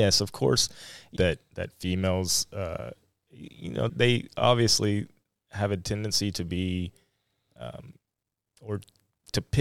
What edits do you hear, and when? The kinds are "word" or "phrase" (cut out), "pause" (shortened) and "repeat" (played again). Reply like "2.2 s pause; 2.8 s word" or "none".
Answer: 1.2 s phrase; 3.9 s word